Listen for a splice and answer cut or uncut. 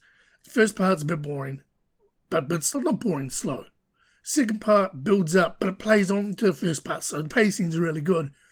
cut